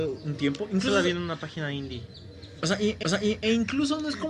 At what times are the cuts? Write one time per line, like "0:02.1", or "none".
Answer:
0:03.0